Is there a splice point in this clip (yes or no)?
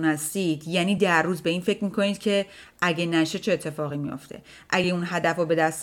no